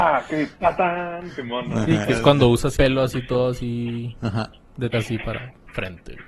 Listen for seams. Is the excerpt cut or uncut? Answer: cut